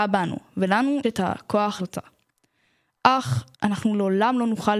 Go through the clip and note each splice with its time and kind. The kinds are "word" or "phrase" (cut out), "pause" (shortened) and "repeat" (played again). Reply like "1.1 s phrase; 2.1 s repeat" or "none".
1.0 s word; 1.8 s word; 3.5 s pause